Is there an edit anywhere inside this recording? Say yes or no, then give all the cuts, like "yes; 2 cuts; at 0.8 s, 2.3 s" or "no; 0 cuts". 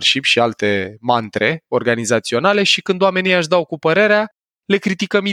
no; 0 cuts